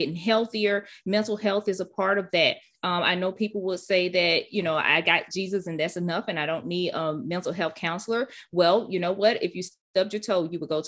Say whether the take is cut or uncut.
uncut